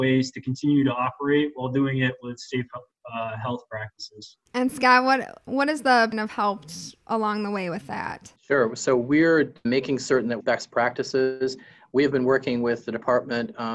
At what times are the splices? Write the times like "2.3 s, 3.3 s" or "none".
4.5 s, 6.1 s, 8.4 s, 9.6 s, 10.4 s

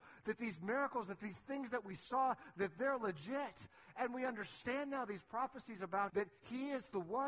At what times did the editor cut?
6.1 s

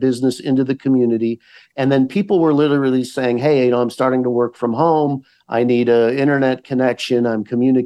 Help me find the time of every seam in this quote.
none

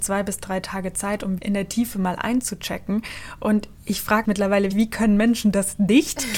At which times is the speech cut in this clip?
1.4 s, 4.2 s, 4.7 s

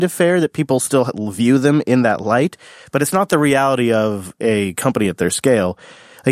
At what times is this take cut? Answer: none

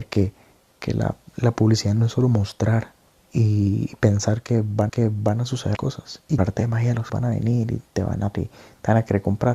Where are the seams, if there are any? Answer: 3.2 s, 4.9 s, 5.8 s, 6.4 s, 7.1 s, 8.3 s

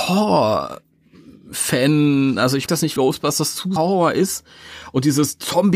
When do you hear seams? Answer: 2.7 s, 3.0 s, 3.8 s

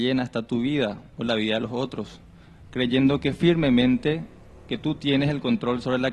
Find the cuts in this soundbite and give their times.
none

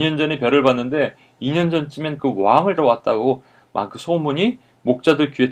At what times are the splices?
2.2 s, 2.8 s, 3.9 s

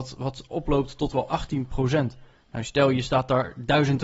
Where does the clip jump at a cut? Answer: none

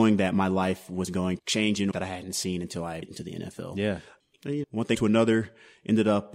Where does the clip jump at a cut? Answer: 1.4 s, 1.9 s, 3.0 s, 4.6 s, 4.9 s

